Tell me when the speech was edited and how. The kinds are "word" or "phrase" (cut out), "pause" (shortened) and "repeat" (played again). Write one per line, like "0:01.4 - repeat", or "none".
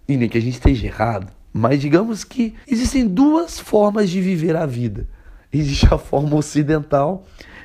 0:02.6 - pause